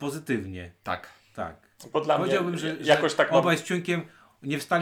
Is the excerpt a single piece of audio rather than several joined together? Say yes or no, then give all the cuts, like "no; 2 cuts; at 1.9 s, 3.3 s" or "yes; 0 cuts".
yes; 0 cuts